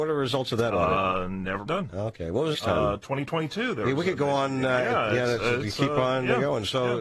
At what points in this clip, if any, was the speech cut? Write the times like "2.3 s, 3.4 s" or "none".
1.7 s, 2.5 s